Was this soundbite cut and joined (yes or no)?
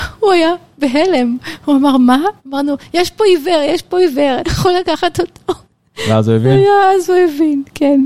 yes